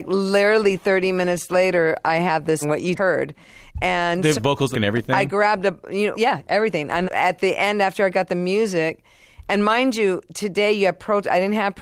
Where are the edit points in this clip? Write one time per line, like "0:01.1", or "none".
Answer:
0:02.6
0:02.9
0:04.3
0:04.7
0:06.1
0:07.0